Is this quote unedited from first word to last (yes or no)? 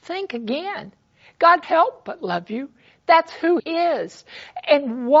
no